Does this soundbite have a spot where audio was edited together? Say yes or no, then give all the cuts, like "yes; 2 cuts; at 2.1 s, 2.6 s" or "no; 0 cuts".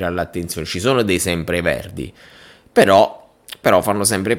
no; 0 cuts